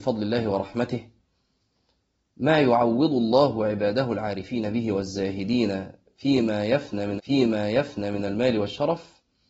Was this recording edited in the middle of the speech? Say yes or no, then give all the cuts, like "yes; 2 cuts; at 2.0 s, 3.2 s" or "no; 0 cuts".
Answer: yes; 1 cut; at 7.2 s